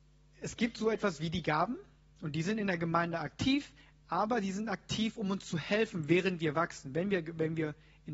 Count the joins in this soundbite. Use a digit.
0